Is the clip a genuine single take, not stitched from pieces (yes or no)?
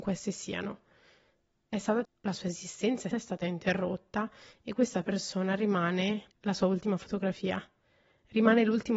no